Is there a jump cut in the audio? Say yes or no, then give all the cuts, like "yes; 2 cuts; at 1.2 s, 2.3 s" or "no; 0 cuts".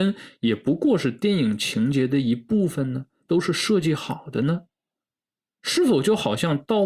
no; 0 cuts